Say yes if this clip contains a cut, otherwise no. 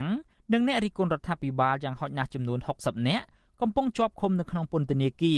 no